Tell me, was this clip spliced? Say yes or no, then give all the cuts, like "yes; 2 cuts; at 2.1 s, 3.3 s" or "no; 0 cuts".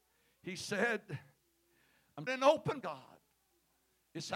yes; 2 cuts; at 2.3 s, 2.8 s